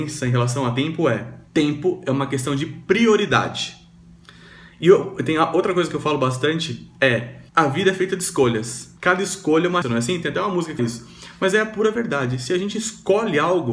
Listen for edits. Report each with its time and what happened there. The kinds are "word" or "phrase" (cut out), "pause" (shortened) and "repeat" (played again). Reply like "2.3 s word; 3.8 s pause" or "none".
1.5 s pause; 7.5 s pause; 9.0 s pause; 9.8 s word; 10.8 s word